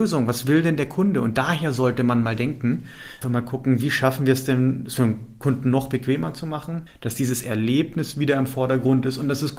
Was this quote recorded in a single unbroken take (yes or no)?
no